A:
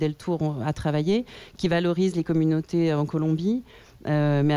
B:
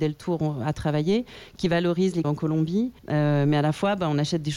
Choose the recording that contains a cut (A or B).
B